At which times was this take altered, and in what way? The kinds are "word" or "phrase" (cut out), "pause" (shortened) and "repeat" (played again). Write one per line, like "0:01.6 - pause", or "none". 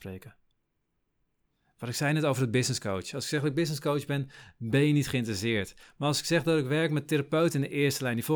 none